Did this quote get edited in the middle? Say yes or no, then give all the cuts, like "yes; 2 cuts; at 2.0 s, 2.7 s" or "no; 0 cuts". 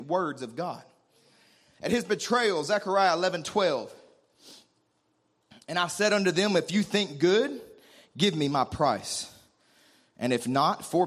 no; 0 cuts